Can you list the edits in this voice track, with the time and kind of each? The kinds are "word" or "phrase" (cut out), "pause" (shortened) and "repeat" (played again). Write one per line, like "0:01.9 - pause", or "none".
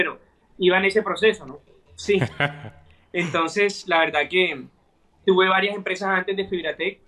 0:05.2 - word